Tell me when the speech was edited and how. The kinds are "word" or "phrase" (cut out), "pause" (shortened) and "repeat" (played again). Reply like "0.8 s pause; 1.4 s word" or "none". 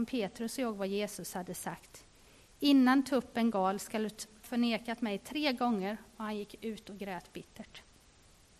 4.4 s word